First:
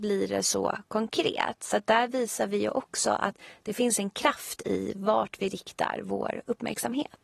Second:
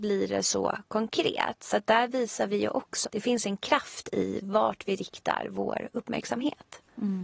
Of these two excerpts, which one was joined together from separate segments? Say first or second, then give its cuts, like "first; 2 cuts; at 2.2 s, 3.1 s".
second; 1 cut; at 3.0 s